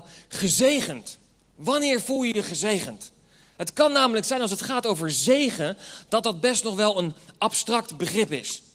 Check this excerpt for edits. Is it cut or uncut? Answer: uncut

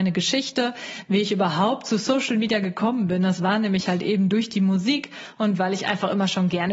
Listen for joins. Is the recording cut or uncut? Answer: uncut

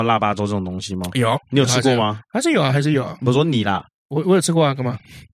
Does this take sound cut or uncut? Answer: uncut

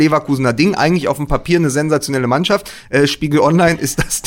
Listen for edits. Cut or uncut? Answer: uncut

